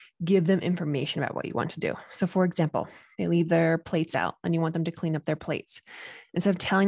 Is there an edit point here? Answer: no; 0 cuts

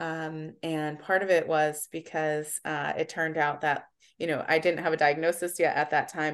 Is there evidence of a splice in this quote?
no; 0 cuts

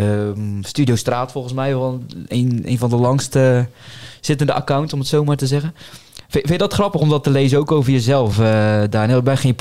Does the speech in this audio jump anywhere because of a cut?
no; 0 cuts

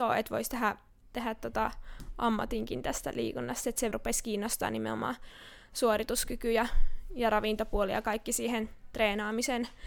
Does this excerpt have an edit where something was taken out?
yes; 1 cut; at 3.9 s

